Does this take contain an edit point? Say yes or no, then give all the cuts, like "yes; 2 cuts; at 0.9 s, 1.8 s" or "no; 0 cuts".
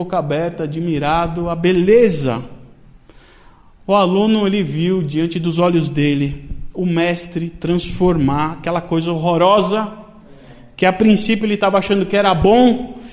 no; 0 cuts